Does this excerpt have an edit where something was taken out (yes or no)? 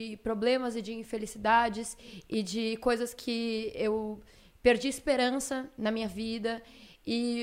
no